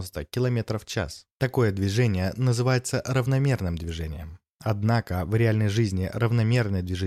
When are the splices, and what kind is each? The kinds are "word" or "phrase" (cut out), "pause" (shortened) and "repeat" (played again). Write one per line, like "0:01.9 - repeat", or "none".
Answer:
0:01.3 - pause